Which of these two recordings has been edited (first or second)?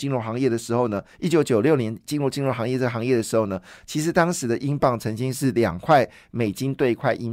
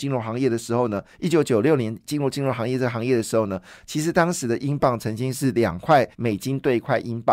second